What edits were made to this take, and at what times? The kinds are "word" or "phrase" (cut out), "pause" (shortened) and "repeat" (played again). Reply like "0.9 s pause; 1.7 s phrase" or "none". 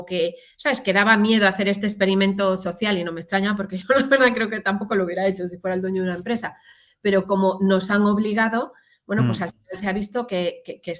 none